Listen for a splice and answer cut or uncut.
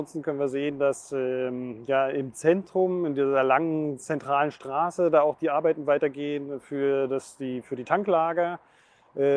uncut